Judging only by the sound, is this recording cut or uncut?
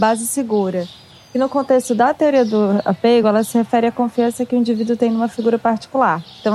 uncut